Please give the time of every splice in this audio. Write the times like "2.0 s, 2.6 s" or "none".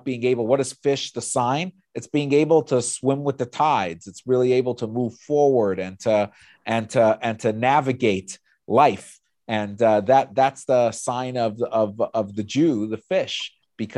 none